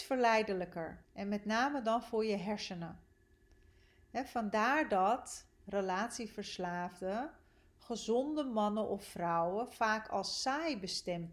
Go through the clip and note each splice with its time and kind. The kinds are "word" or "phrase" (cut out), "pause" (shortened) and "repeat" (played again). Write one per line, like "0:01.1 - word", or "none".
0:01.0 - pause